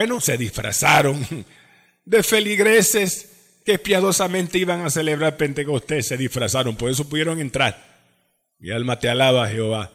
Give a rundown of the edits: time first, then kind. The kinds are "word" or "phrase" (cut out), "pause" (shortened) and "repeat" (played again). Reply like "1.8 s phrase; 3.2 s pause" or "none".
none